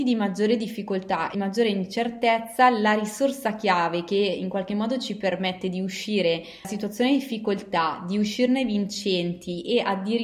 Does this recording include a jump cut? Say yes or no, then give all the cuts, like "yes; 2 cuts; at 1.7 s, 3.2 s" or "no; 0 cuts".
yes; 2 cuts; at 1.3 s, 6.6 s